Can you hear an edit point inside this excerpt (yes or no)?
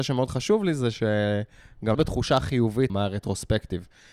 yes